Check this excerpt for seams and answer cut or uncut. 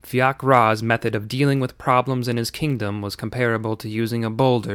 uncut